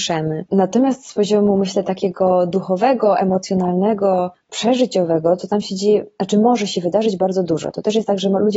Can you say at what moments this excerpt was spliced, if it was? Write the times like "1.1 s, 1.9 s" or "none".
none